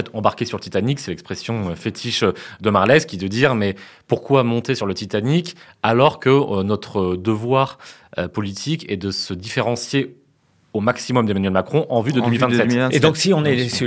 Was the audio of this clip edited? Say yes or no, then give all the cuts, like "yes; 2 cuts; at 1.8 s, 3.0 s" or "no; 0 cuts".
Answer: no; 0 cuts